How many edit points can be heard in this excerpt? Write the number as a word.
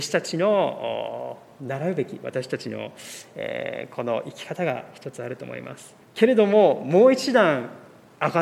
one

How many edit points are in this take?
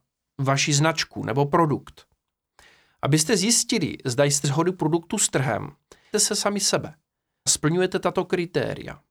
three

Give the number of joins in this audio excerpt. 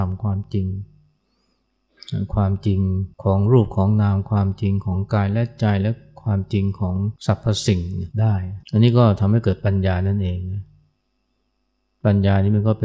four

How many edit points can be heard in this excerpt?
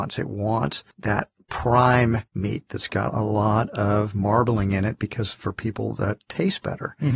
two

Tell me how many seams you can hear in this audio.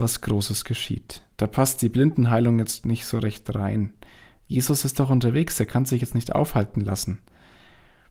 one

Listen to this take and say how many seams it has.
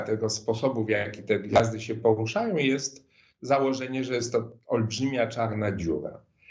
zero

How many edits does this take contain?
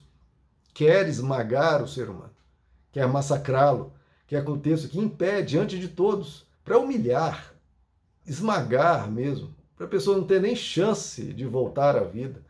three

